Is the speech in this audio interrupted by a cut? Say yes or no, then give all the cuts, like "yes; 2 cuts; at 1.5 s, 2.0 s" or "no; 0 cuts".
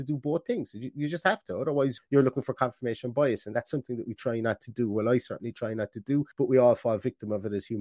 yes; 2 cuts; at 2.0 s, 6.3 s